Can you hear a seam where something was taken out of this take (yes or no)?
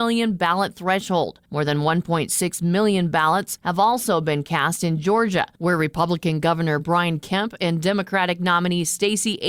no